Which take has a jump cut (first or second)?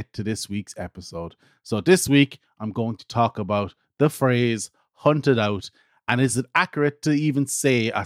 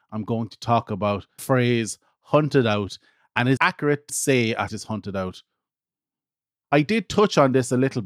second